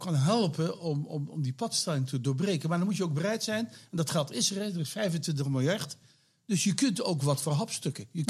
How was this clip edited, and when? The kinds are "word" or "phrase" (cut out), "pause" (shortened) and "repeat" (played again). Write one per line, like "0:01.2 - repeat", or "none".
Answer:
none